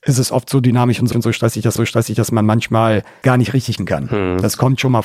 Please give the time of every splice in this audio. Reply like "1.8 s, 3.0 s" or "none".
1.1 s, 1.8 s, 3.2 s, 3.8 s

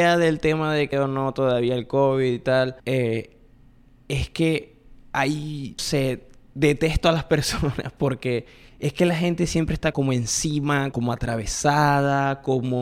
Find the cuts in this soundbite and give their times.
0.9 s, 2.8 s, 5.8 s, 8.7 s, 9.9 s, 10.9 s

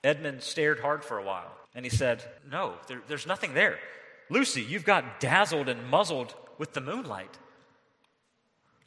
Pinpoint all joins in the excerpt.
1.6 s, 2.4 s

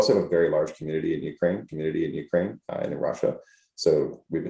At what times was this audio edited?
1.7 s

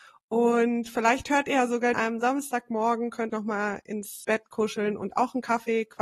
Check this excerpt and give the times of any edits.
1.9 s, 3.3 s, 4.2 s

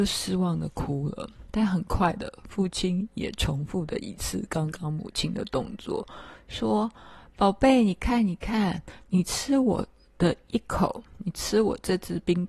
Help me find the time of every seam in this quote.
9.1 s

